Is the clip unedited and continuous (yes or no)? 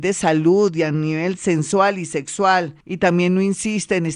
no